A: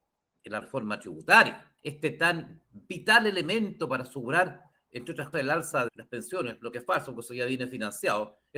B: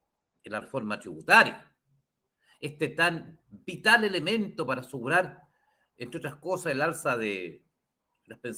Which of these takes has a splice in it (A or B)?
A